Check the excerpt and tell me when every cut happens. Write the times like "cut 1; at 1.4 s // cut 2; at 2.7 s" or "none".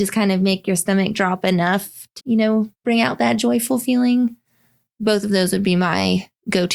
cut 1; at 2.2 s // cut 2; at 2.7 s